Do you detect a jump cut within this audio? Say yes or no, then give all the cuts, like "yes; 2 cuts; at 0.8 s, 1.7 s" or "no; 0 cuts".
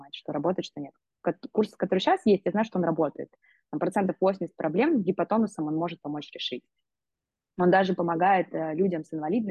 no; 0 cuts